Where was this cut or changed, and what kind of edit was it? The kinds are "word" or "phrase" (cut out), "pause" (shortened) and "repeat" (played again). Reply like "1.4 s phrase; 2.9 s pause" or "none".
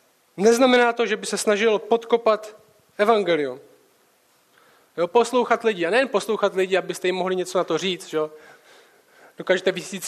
none